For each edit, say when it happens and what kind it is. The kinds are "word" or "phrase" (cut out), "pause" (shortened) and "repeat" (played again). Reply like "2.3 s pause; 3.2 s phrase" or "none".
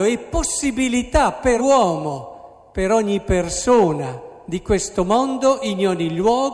1.6 s word